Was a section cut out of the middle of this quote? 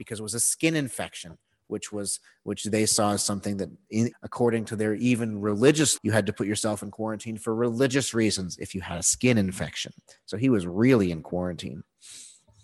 yes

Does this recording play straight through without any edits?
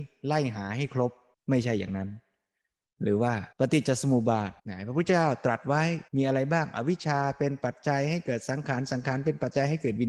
no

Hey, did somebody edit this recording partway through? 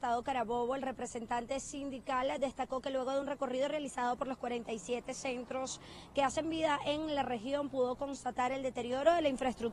no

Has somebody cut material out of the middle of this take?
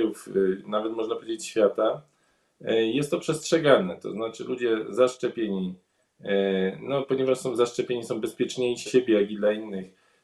yes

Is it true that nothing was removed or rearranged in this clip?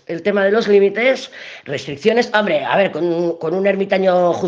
yes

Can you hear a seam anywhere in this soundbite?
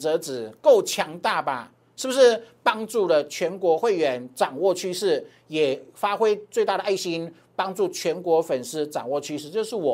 no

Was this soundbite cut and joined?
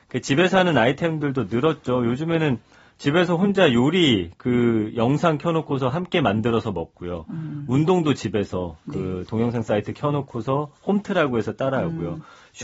no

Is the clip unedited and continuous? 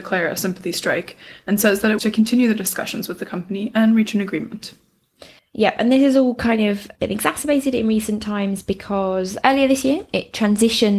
no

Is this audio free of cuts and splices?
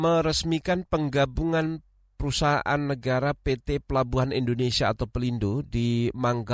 yes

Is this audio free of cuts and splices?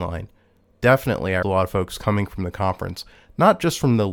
no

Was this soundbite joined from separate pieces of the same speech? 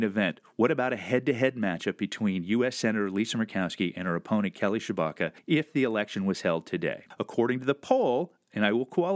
no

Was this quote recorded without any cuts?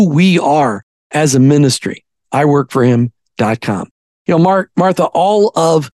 yes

